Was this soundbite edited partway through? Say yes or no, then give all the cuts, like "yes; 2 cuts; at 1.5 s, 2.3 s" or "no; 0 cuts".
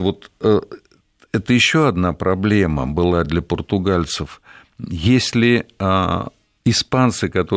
no; 0 cuts